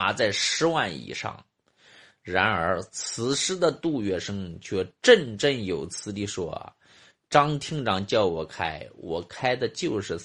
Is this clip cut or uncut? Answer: uncut